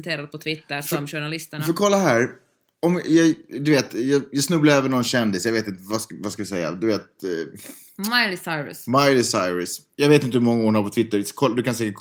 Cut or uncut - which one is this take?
uncut